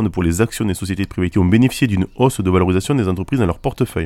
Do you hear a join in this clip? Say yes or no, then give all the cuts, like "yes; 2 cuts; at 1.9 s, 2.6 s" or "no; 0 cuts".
yes; 1 cut; at 1.3 s